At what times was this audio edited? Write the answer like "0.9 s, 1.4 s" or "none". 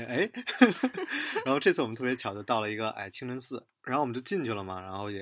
3.7 s